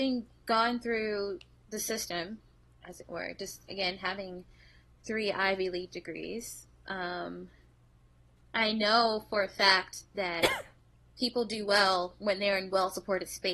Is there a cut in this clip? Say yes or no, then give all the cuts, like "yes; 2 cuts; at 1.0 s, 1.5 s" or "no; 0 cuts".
yes; 1 cut; at 3.7 s